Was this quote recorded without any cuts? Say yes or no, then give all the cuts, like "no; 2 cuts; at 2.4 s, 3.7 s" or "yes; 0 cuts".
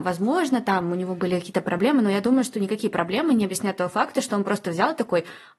yes; 0 cuts